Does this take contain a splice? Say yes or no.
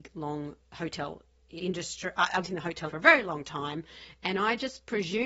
yes